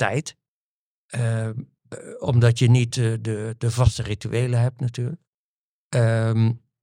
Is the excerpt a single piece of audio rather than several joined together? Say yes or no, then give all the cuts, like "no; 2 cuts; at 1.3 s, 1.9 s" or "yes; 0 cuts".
yes; 0 cuts